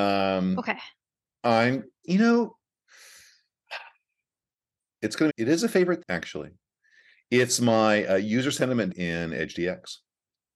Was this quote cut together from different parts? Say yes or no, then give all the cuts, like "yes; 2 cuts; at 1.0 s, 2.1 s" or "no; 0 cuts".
yes; 4 cuts; at 2.0 s, 5.3 s, 6.0 s, 8.9 s